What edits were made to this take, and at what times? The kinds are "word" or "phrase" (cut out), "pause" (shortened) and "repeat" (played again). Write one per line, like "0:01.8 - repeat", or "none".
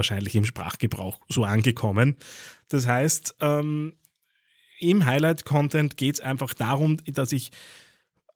none